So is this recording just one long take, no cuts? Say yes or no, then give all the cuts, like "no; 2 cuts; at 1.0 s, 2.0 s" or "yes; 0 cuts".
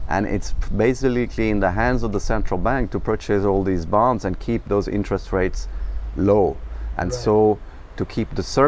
yes; 0 cuts